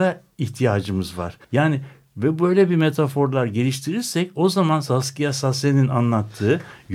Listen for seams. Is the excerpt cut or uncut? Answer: cut